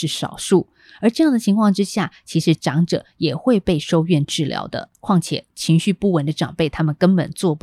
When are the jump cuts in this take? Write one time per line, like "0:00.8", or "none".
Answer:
0:04.9